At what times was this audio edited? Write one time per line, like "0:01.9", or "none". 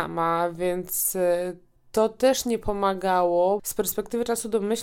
0:01.8
0:03.6